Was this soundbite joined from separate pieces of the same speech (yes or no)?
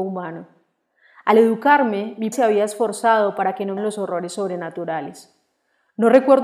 yes